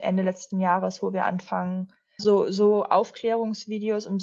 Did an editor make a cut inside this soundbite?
yes; 1 cut; at 2.2 s

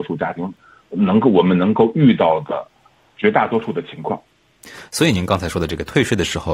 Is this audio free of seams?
yes; 0 cuts

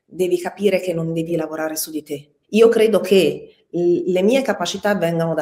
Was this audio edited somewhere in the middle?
yes; 2 cuts; at 1.3 s, 2.4 s

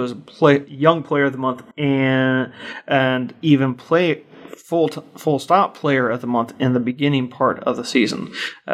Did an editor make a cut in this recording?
yes; 1 cut; at 1.7 s

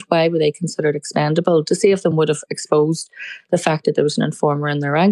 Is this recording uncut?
yes; 0 cuts

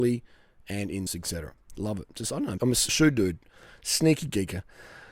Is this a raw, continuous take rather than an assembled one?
no; 3 cuts; at 1.1 s, 2.6 s, 2.9 s

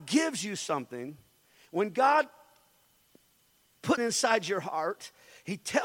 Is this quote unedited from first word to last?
no; 1 cut; at 4.0 s

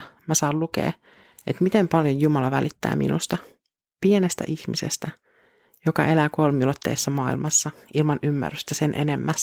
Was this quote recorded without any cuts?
yes; 0 cuts

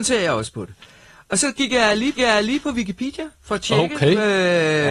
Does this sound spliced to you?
yes; 1 cut; at 2.2 s

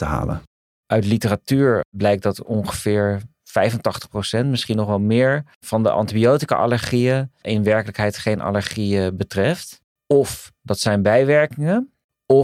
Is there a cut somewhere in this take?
no; 0 cuts

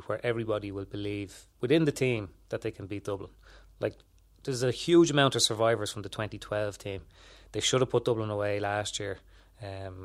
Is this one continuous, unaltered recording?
yes; 0 cuts

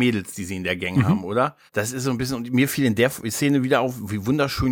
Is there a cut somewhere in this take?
yes; 1 cut; at 1.7 s

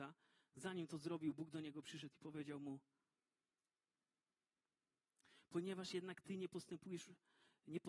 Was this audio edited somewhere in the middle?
no; 0 cuts

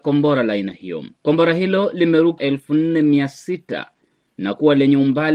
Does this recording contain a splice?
yes; 2 cuts; at 1.2 s, 2.4 s

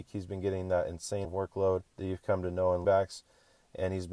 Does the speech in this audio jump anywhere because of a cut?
yes; 3 cuts; at 1.2 s, 1.9 s, 2.8 s

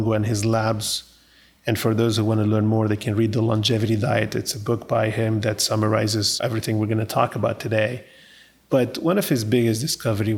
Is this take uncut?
yes; 0 cuts

